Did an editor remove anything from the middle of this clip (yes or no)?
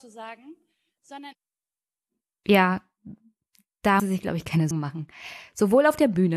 yes